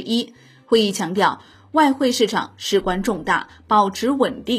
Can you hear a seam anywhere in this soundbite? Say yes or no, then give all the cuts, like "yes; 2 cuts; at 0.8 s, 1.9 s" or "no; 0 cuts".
no; 0 cuts